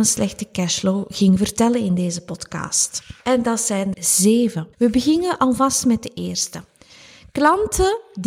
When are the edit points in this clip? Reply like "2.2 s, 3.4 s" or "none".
3.2 s, 3.9 s, 4.7 s